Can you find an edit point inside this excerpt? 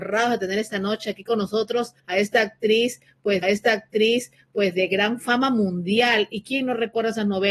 yes; 2 cuts; at 2.0 s, 3.4 s

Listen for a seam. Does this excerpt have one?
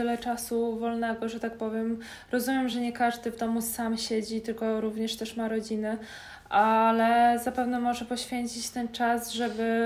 no; 0 cuts

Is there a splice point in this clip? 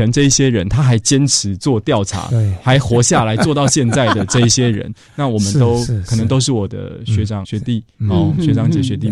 yes; 1 cut; at 7.4 s

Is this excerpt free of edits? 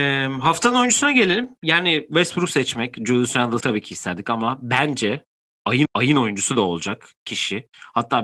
no; 2 cuts; at 3.6 s, 5.8 s

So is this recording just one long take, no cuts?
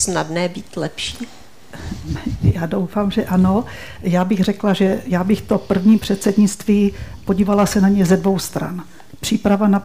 yes; 0 cuts

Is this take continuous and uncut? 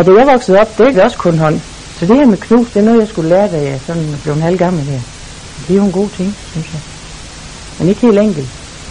no; 1 cut; at 0.9 s

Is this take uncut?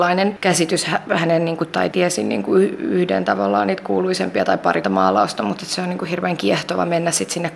no; 2 cuts; at 1.9 s, 4.8 s

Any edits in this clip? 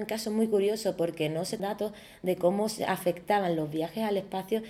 yes; 1 cut; at 1.6 s

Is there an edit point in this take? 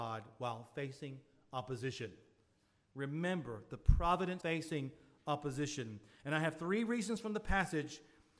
yes; 1 cut; at 4.4 s

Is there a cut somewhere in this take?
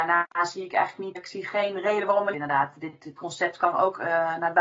yes; 3 cuts; at 1.1 s, 2.3 s, 3.2 s

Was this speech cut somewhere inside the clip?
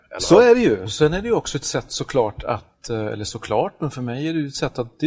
no; 0 cuts

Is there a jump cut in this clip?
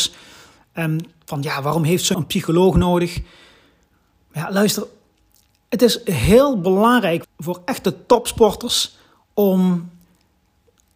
yes; 2 cuts; at 2.1 s, 7.2 s

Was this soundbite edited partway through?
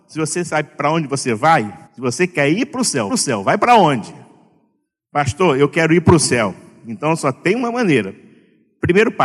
yes; 2 cuts; at 1.9 s, 3.1 s

